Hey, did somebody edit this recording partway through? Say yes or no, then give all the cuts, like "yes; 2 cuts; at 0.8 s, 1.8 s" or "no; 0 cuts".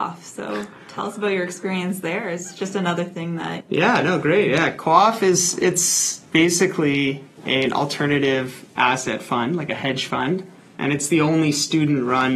no; 0 cuts